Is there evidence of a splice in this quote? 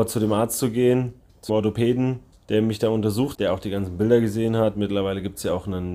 yes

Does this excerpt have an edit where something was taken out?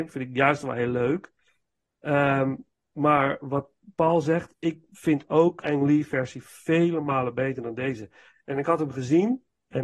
yes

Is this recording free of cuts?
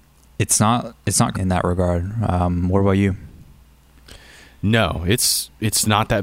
no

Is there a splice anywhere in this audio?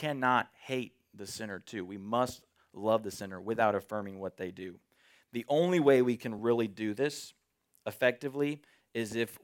no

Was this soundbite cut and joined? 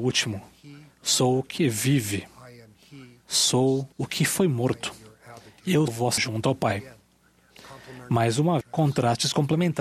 yes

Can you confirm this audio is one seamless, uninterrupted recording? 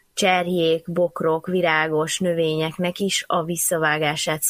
yes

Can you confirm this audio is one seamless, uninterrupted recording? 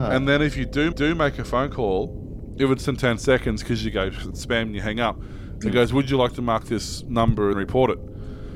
no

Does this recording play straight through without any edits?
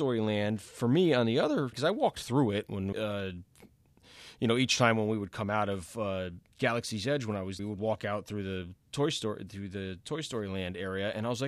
no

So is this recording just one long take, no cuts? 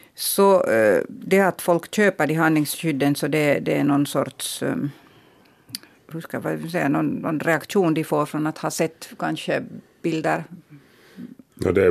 yes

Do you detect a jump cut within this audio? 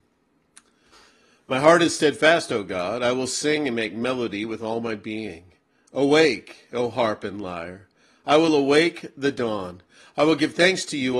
no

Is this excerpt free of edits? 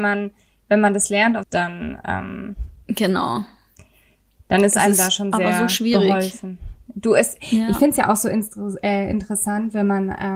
no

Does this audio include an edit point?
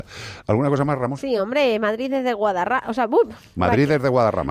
no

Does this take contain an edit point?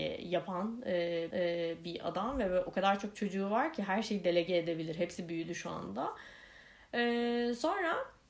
yes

